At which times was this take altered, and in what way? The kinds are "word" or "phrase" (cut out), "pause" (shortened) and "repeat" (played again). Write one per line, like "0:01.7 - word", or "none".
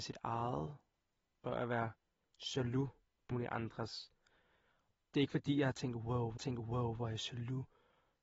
0:01.4 - phrase
0:03.3 - word
0:06.4 - repeat